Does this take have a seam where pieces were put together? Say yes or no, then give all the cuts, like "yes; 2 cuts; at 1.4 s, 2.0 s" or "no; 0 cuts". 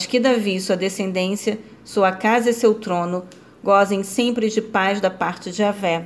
no; 0 cuts